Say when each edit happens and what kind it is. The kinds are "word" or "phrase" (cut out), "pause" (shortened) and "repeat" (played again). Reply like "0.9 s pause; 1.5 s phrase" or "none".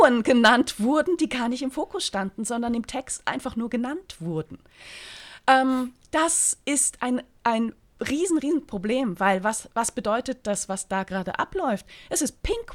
8.4 s word